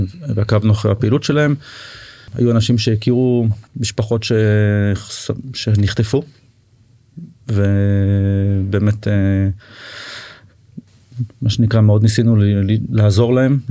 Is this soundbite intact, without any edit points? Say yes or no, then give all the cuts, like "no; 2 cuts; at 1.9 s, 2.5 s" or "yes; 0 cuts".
no; 1 cut; at 3.7 s